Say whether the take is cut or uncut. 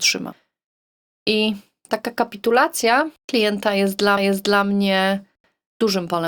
cut